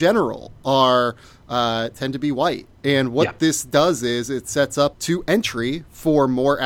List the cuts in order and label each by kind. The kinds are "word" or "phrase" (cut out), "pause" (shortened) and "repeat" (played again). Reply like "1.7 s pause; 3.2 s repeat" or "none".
4.9 s phrase